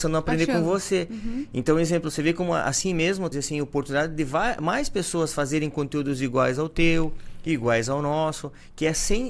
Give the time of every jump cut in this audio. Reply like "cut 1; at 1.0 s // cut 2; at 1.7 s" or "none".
cut 1; at 3.3 s